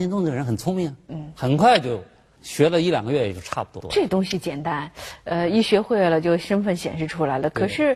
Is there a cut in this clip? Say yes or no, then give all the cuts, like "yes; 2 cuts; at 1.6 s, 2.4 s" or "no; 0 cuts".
no; 0 cuts